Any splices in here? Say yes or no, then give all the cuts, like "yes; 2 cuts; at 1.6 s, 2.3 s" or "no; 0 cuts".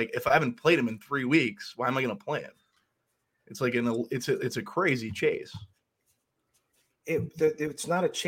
no; 0 cuts